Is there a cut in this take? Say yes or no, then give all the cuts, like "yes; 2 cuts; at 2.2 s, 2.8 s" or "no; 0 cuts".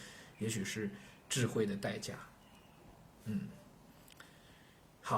no; 0 cuts